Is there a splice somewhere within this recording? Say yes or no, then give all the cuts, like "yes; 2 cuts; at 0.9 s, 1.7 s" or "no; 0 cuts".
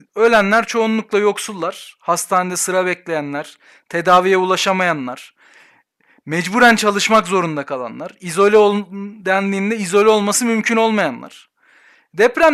no; 0 cuts